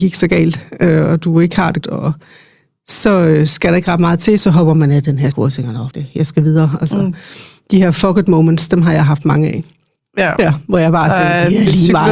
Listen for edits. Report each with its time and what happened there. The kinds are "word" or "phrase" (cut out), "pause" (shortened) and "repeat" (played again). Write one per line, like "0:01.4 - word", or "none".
0:01.8 - word
0:05.3 - word
0:05.9 - word